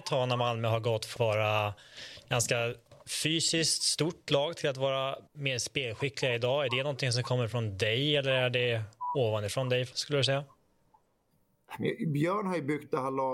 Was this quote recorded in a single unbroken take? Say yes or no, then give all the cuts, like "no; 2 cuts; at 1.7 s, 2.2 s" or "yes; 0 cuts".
no; 3 cuts; at 1.2 s, 5.3 s, 9.9 s